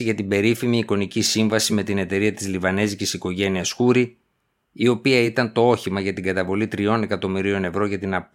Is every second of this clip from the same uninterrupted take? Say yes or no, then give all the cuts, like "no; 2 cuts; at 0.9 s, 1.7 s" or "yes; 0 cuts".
yes; 0 cuts